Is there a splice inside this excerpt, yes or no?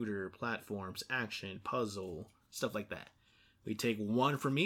no